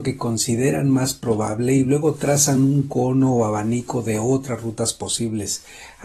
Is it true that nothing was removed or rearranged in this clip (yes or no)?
yes